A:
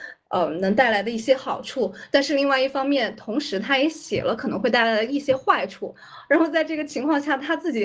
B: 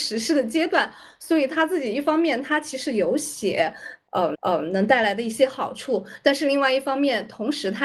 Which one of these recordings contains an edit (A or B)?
B